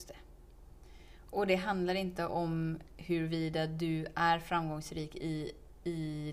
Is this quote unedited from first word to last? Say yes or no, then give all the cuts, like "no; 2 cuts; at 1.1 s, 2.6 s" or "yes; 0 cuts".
yes; 0 cuts